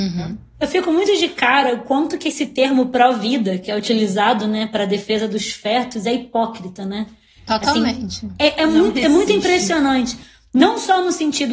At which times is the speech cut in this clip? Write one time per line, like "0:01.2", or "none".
none